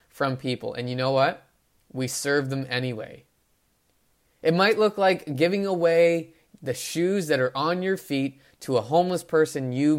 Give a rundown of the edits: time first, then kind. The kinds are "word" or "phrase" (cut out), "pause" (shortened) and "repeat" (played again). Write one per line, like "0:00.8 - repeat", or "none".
none